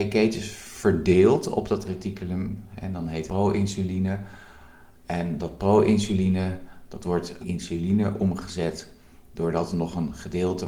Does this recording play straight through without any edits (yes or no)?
no